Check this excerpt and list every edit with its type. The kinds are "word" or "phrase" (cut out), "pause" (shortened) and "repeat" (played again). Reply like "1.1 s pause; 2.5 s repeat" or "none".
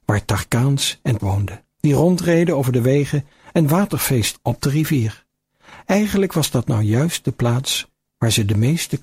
1.2 s word; 1.7 s pause; 4.4 s word